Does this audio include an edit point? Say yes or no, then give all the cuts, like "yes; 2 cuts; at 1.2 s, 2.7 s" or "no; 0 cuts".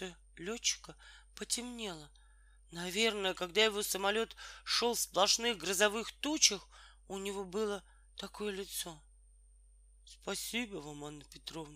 no; 0 cuts